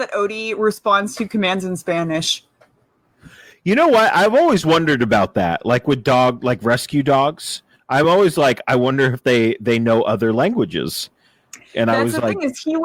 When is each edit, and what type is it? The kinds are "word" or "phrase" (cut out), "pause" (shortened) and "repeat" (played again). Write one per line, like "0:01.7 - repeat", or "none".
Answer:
none